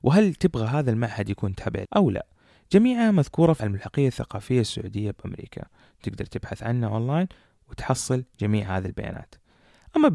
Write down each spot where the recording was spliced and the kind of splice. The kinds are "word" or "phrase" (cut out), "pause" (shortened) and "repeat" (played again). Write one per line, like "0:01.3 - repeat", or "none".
0:01.8 - word
0:03.6 - word